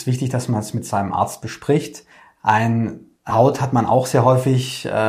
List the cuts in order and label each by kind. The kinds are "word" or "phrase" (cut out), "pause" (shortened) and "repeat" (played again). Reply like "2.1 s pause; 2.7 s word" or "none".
2.1 s pause; 3.3 s word